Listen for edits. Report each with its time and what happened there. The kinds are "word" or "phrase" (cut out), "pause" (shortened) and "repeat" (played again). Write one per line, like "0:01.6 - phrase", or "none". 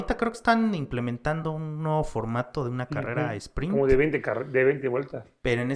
none